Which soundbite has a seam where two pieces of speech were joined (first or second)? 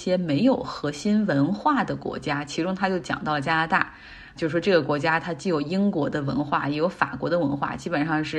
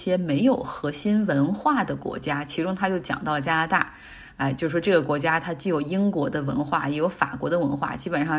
first